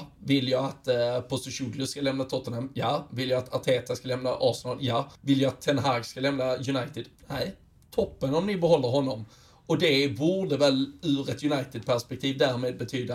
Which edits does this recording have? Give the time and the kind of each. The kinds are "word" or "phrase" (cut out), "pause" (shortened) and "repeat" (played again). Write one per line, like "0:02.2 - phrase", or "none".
0:05.2 - pause
0:07.2 - pause